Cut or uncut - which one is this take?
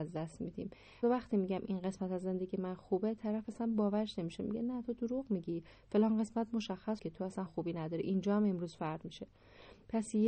cut